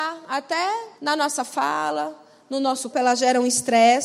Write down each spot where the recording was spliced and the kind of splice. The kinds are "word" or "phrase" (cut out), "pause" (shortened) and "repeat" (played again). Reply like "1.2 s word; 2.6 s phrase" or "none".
1.0 s pause; 2.9 s word